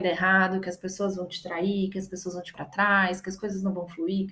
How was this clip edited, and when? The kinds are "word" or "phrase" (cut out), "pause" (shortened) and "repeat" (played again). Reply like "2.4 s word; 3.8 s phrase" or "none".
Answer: 2.5 s word